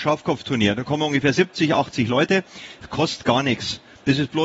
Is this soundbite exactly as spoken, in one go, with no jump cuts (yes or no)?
yes